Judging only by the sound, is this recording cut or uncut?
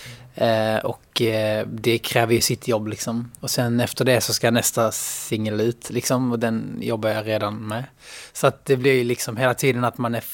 uncut